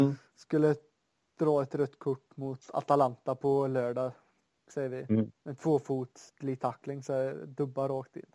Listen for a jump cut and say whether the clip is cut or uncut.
cut